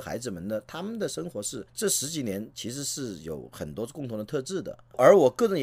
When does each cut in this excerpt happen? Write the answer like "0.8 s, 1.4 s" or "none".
1.7 s